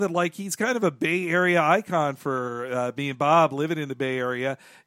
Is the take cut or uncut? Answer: uncut